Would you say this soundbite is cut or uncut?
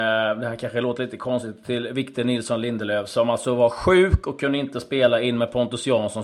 uncut